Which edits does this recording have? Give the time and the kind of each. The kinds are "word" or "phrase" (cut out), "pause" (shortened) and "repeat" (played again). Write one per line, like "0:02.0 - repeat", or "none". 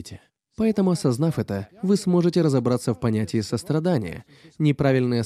0:01.7 - pause